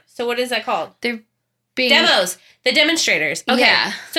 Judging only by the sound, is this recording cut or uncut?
uncut